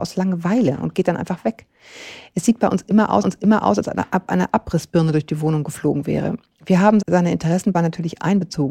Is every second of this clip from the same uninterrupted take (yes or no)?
no